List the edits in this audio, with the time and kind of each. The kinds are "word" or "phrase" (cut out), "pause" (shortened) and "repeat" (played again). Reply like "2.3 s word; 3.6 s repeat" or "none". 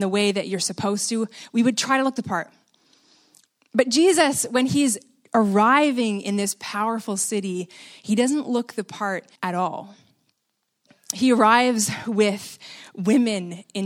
9.4 s pause